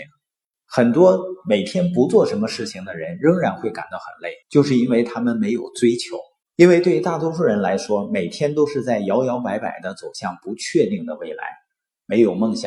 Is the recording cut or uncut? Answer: cut